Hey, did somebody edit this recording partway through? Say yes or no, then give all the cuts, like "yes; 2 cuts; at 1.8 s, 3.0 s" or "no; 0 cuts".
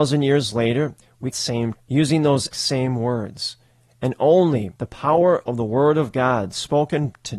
yes; 4 cuts; at 1.3 s, 1.7 s, 2.5 s, 4.8 s